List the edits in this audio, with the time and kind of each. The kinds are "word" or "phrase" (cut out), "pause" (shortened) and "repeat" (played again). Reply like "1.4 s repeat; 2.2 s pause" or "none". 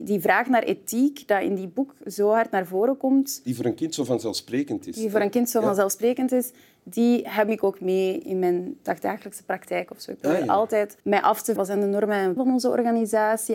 2.0 s phrase; 7.5 s phrase; 11.0 s pause; 11.6 s word; 12.4 s word